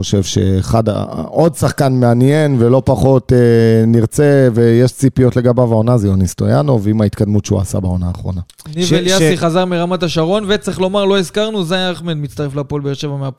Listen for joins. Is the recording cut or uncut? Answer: uncut